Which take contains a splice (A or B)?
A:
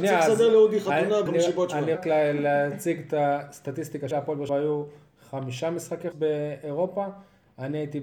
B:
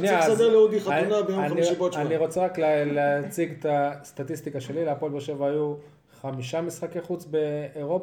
A